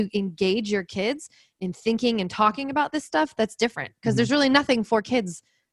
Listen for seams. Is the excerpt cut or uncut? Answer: uncut